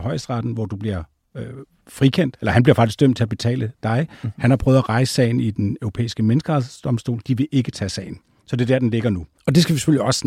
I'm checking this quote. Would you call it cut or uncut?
uncut